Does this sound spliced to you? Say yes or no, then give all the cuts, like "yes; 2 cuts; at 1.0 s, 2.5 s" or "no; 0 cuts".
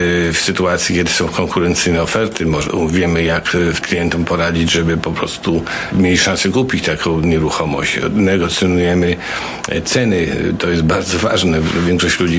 no; 0 cuts